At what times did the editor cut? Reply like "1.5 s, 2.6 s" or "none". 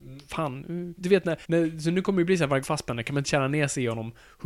1.0 s, 1.4 s, 2.6 s, 3.2 s